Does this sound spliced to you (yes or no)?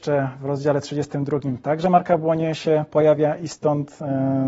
no